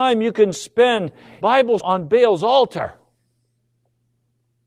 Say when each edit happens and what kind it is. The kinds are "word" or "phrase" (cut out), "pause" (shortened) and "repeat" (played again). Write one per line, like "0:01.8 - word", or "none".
0:01.4 - word
0:01.8 - word